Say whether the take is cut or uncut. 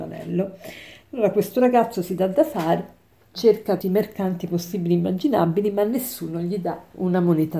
cut